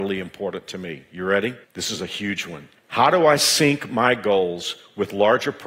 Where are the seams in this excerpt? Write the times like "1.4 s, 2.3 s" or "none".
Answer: 1.6 s, 2.8 s